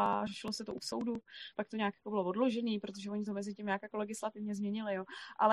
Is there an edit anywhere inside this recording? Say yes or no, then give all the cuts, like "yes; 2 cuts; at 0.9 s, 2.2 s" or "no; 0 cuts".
no; 0 cuts